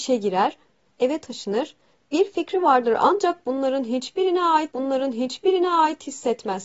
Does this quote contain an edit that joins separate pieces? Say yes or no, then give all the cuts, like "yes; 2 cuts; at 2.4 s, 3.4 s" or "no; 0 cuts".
yes; 1 cut; at 4.7 s